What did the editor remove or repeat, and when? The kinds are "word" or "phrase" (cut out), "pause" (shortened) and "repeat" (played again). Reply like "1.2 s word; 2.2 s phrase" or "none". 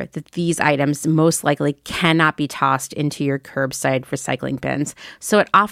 none